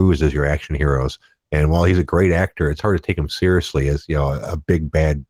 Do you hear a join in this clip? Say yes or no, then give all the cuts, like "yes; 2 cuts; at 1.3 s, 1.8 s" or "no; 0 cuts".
no; 0 cuts